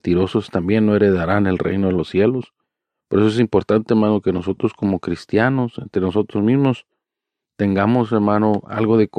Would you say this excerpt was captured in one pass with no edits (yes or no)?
yes